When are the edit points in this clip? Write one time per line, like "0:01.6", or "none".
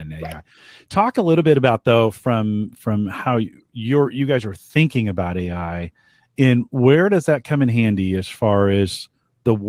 none